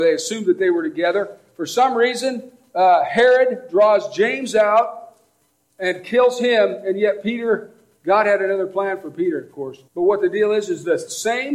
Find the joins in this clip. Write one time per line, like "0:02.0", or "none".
0:09.9